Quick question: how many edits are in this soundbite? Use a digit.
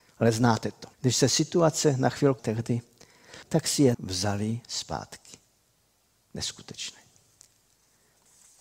4